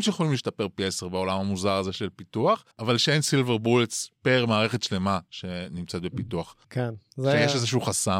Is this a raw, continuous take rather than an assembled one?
no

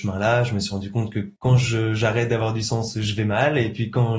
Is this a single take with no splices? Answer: no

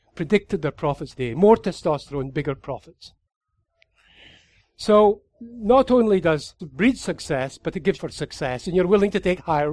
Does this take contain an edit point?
yes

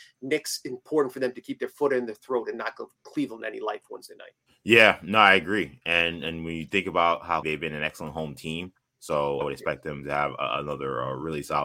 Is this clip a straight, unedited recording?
no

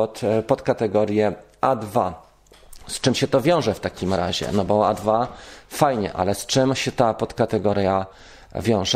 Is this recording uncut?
yes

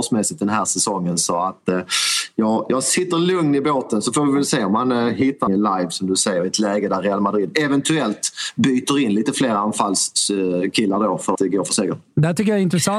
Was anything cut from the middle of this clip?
yes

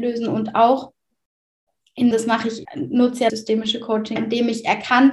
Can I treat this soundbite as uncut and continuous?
no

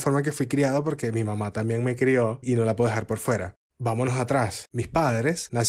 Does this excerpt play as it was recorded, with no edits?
yes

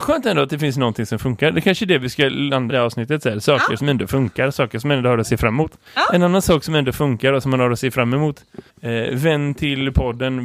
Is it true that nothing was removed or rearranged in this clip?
no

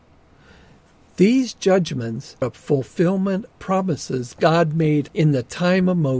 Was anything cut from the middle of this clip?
yes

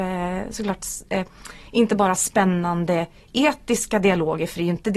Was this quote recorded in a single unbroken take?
yes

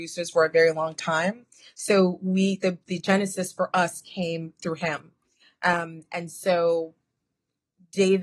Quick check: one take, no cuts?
yes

